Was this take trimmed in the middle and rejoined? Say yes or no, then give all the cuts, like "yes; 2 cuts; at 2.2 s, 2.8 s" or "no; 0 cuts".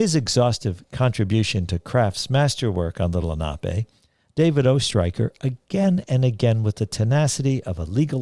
no; 0 cuts